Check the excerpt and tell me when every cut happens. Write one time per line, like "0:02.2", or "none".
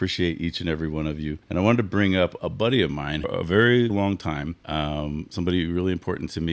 0:01.4
0:02.4
0:03.2
0:03.9
0:04.6

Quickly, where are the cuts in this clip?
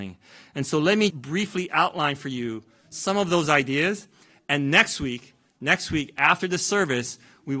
0:01.1

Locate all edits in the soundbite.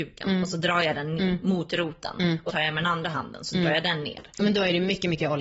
0:01.2
0:02.5

